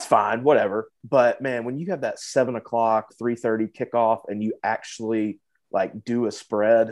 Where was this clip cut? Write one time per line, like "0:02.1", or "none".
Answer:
0:01.0
0:03.1